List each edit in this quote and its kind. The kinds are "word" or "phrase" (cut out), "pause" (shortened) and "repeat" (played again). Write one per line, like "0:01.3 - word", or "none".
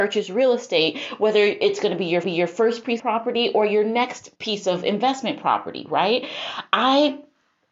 0:02.2 - repeat
0:03.0 - word
0:04.4 - pause